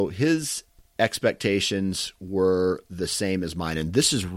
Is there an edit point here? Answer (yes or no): no